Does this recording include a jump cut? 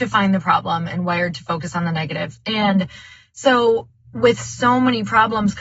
no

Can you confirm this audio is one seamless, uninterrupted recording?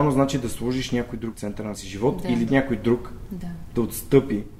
no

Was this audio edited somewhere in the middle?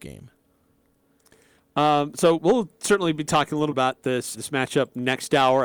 yes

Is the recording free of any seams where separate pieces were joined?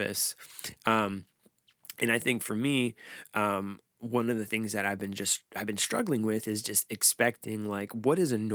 yes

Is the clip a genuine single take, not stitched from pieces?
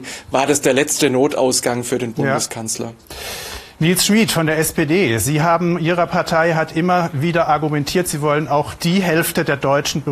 yes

